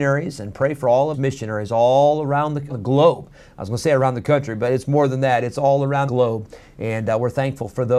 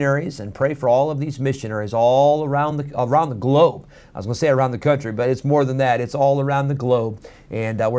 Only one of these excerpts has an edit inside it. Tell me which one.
first; 3 cuts; at 1.1 s, 2.7 s, 6.1 s

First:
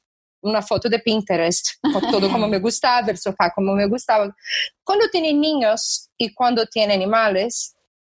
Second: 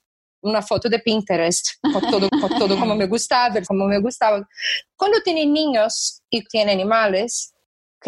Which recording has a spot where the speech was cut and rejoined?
second; 3 cuts; at 2.3 s, 3.7 s, 6.5 s

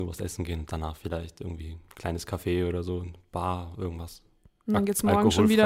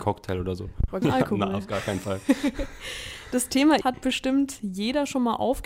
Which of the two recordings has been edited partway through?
second; 2 cuts; at 1.0 s, 3.8 s

